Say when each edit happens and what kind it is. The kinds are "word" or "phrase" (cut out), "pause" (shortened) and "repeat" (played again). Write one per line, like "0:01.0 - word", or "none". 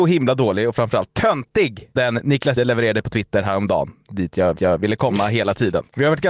0:02.0 - word
0:02.6 - word
0:04.6 - repeat

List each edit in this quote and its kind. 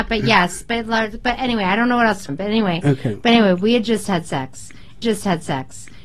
0:02.3 - word
0:05.0 - repeat

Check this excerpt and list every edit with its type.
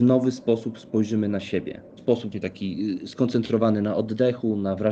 0:02.3 - word

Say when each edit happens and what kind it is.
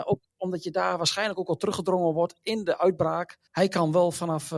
0:03.5 - pause

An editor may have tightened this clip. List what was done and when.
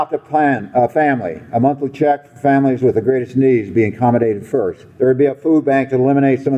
0:04.9 - pause

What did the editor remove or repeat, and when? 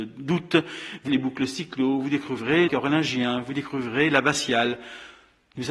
0:01.1 - word
0:02.7 - word

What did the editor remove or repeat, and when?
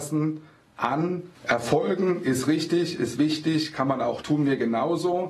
0:01.4 - pause
0:04.2 - word

